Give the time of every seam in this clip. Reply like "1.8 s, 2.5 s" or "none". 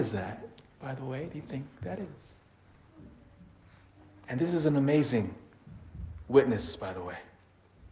none